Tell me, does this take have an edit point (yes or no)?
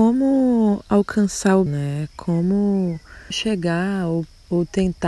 yes